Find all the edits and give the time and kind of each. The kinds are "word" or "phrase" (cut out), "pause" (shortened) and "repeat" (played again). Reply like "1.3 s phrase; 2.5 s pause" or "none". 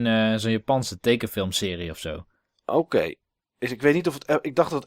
none

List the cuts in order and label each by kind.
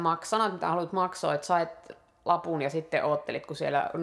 none

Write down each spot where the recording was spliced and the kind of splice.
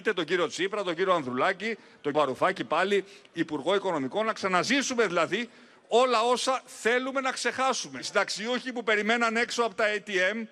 2.1 s word

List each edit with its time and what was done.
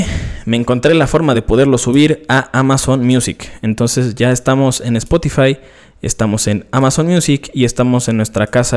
none

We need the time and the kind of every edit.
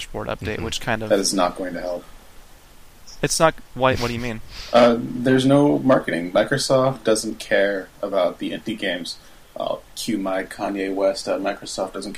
none

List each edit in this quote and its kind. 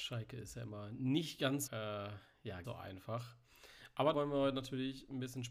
1.7 s word; 2.6 s word; 4.1 s word

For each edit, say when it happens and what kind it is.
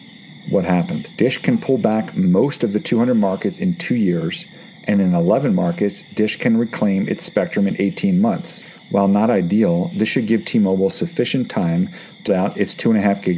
1.1 s pause; 12.3 s word

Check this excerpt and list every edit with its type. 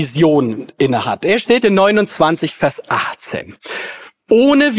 1.6 s phrase

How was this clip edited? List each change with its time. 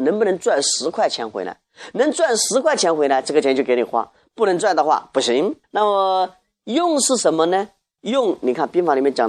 5.6 s pause

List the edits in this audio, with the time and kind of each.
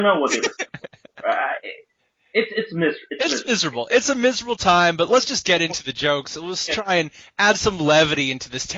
none

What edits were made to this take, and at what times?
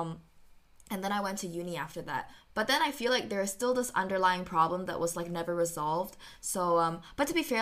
none

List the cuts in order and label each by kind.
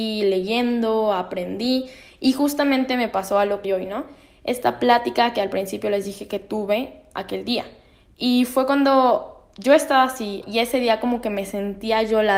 3.6 s word; 10.4 s word

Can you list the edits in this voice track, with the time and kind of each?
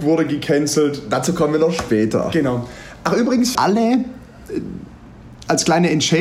3.5 s word

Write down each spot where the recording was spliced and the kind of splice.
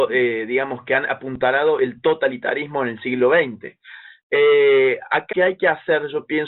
5.3 s word

